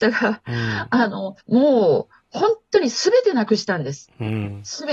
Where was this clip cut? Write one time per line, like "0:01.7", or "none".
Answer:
0:01.4